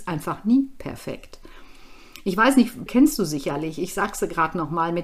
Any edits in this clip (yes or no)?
yes